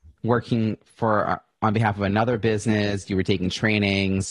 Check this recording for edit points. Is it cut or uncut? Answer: uncut